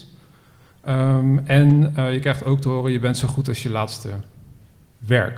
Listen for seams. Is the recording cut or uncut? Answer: uncut